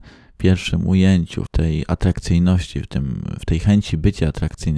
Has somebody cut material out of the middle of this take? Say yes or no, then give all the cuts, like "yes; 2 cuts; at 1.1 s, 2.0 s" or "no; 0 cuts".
yes; 1 cut; at 1.5 s